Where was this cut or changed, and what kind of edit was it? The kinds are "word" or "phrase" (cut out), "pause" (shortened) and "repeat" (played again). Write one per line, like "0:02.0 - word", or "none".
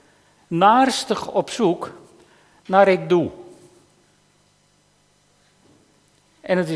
none